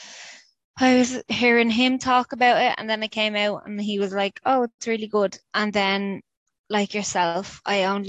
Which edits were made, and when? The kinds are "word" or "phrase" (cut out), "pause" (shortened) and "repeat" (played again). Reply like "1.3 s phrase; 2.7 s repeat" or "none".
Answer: none